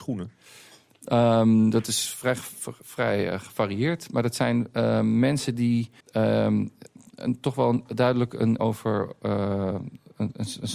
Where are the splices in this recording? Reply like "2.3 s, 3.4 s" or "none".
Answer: 6.0 s, 8.6 s